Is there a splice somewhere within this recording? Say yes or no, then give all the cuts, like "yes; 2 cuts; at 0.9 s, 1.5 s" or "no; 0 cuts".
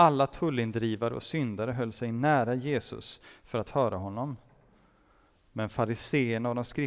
no; 0 cuts